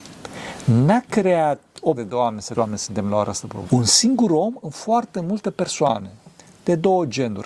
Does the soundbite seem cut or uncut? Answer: cut